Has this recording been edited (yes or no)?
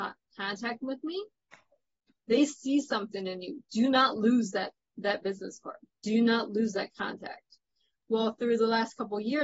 no